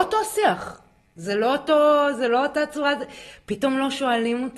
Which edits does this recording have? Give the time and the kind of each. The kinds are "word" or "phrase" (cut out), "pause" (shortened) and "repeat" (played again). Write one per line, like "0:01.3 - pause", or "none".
none